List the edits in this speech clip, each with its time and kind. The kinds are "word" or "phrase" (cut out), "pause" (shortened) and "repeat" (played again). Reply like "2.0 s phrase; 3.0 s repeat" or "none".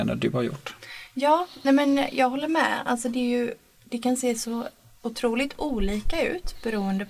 none